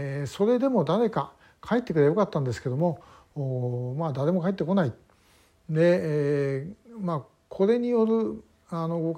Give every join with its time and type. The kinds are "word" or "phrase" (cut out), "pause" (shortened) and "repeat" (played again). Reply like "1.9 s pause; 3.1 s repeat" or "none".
none

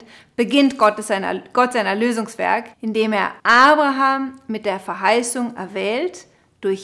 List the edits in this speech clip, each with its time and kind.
2.7 s pause; 3.4 s pause

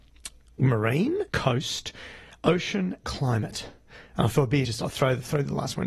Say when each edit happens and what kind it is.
1.3 s pause; 3.0 s word; 4.6 s word

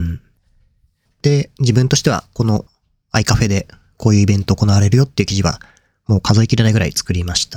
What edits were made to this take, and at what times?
none

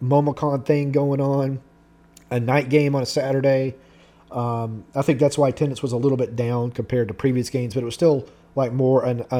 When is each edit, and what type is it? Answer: none

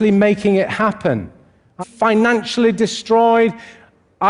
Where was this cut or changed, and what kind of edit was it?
1.8 s phrase

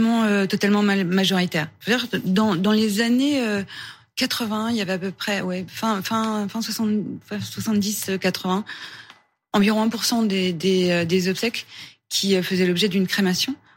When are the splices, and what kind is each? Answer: none

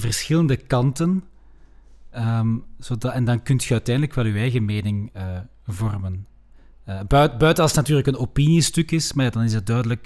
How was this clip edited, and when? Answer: none

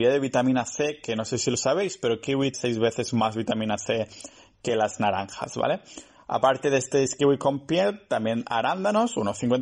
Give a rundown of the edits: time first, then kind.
2.5 s word

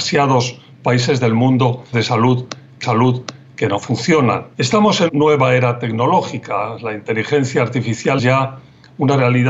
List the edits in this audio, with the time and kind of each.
1.9 s word; 2.8 s repeat; 4.5 s pause; 5.1 s word; 8.2 s word

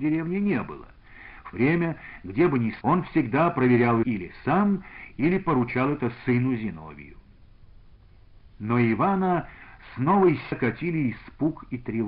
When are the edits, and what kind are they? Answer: 1.5 s word; 2.8 s word; 4.0 s word; 10.5 s word

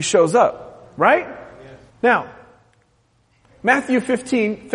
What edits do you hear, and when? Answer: 1.9 s pause

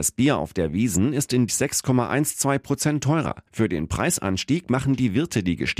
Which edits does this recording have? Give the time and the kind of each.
1.5 s phrase; 3.5 s pause

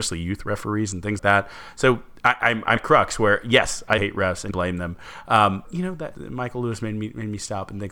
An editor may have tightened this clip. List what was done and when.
1.2 s word; 2.8 s word; 4.0 s word; 4.5 s phrase; 5.6 s word; 6.1 s word

